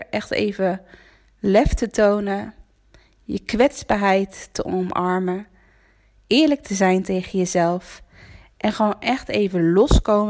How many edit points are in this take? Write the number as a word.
zero